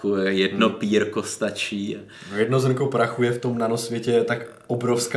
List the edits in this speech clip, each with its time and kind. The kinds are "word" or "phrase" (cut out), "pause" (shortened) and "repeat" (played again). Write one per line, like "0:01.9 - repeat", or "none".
none